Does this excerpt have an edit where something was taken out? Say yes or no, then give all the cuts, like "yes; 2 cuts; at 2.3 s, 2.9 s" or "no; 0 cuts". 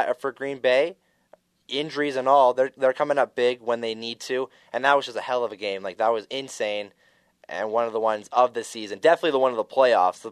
no; 0 cuts